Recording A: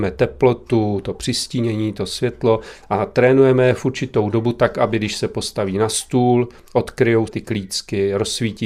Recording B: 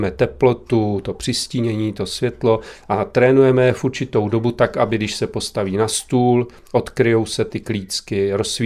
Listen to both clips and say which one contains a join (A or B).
A